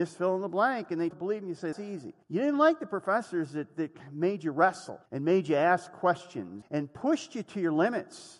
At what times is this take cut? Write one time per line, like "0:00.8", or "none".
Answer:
0:01.1
0:01.7
0:02.2
0:05.1
0:06.6